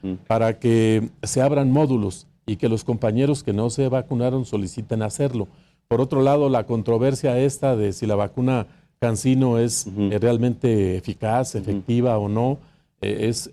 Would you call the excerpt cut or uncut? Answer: uncut